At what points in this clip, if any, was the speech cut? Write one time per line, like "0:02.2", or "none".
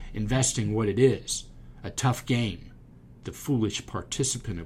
none